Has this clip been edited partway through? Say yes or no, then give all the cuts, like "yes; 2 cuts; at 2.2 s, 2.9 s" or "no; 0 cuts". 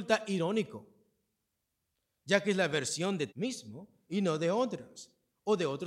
yes; 1 cut; at 3.3 s